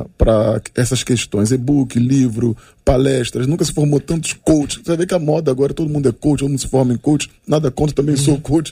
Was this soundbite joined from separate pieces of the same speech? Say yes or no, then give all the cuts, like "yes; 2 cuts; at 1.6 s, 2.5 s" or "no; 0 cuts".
no; 0 cuts